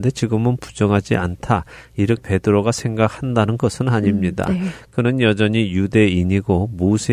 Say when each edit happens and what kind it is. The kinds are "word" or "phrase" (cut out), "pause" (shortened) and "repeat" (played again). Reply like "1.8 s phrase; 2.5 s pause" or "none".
2.2 s word